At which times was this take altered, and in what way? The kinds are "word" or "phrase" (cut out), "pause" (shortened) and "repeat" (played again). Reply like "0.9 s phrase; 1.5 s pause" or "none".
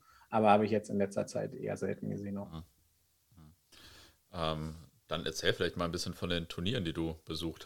none

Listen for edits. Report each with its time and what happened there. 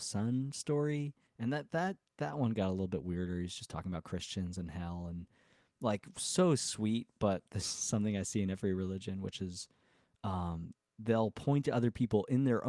1.3 s pause

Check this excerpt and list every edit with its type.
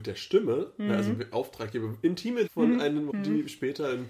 1.3 s word; 2.5 s word; 3.1 s word

